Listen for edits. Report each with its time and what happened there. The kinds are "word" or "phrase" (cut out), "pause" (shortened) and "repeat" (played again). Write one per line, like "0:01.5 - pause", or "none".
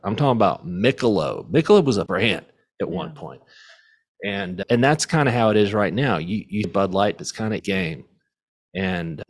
0:02.1 - word
0:06.6 - word
0:07.2 - word
0:07.6 - word